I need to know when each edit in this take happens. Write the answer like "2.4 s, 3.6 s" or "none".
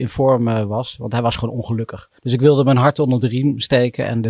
2.2 s